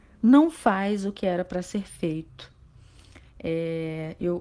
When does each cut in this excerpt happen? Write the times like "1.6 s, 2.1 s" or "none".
3.3 s